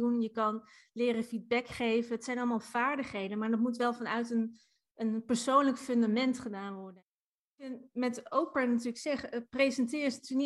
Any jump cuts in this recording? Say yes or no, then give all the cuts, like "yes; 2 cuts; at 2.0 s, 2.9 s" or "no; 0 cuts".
no; 0 cuts